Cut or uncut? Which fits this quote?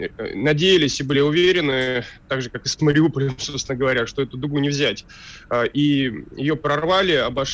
uncut